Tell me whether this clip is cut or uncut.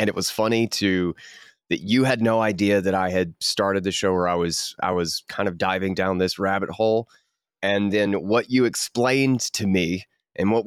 uncut